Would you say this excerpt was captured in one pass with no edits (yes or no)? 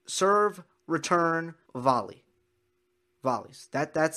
no